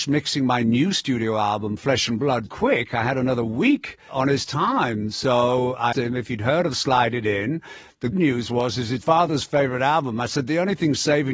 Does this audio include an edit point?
yes; 4 cuts; at 2.5 s, 5.9 s, 8.1 s, 9.0 s

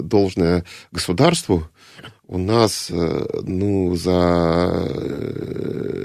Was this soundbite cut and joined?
no; 0 cuts

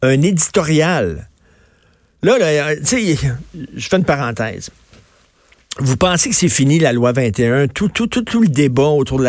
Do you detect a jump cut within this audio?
no; 0 cuts

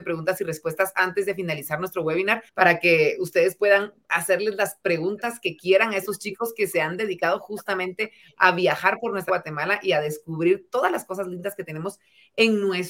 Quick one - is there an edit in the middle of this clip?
yes; 2 cuts; at 2.5 s, 9.3 s

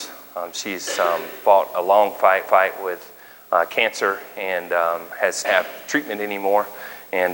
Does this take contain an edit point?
yes; 2 cuts; at 2.5 s, 5.4 s

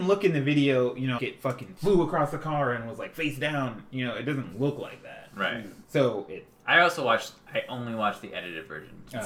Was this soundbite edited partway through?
yes; 2 cuts; at 1.2 s, 5.8 s

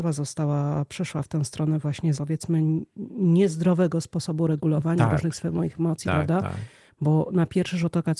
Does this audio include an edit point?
yes; 1 cut; at 2.2 s

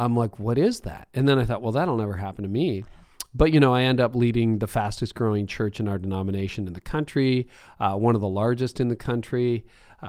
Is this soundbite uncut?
yes; 0 cuts

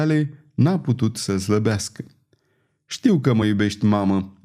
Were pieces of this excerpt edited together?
no; 0 cuts

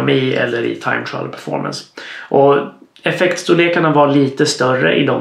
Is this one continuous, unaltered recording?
yes; 0 cuts

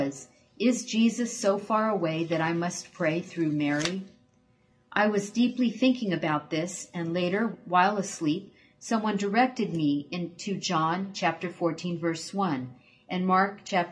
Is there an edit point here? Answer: no; 0 cuts

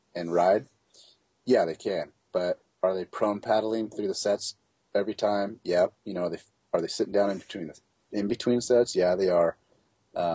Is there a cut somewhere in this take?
yes; 1 cut; at 6.0 s

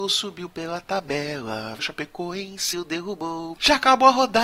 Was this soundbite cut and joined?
yes; 2 cuts; at 1.8 s, 2.7 s

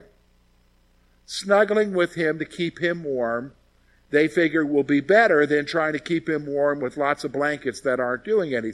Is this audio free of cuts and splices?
yes; 0 cuts

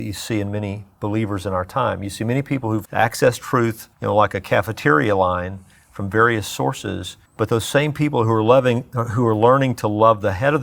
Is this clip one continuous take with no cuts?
no; 3 cuts; at 2.8 s, 3.9 s, 7.3 s

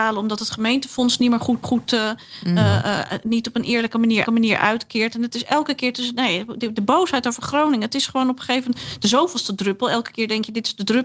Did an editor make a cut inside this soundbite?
yes; 2 cuts; at 1.6 s, 4.2 s

